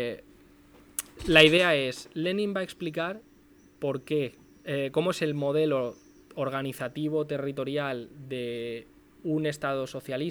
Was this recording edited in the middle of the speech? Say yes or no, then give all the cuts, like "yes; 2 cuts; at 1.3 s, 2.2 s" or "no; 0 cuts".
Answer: no; 0 cuts